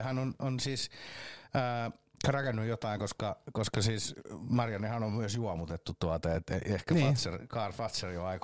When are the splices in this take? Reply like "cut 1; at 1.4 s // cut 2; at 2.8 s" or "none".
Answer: none